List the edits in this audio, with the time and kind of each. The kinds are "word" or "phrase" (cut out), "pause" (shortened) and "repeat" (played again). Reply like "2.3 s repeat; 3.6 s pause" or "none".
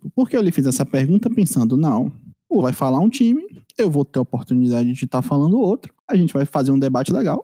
2.6 s word; 6.0 s pause